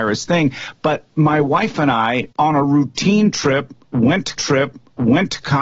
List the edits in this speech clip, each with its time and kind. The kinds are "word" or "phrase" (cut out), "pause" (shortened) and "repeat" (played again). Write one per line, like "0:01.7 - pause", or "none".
0:02.3 - pause
0:04.4 - repeat